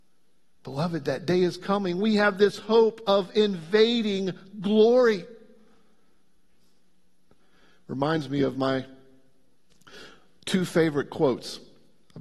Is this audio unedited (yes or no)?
yes